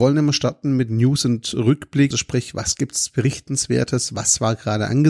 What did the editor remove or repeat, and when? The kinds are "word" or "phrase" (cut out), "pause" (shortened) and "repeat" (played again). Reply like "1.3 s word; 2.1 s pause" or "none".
2.1 s word